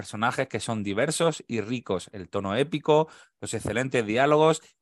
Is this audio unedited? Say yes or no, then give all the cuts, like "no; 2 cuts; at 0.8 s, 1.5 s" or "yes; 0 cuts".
yes; 0 cuts